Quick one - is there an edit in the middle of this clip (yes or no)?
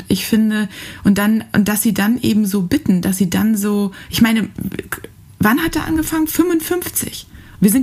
no